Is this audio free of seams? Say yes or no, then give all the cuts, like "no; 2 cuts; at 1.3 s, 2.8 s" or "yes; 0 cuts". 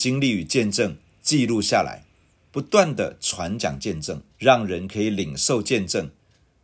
no; 1 cut; at 4.3 s